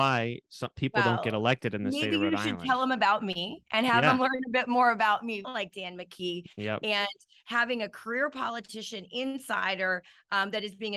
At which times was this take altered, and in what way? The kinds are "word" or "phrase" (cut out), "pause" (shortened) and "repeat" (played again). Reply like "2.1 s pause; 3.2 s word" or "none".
5.4 s phrase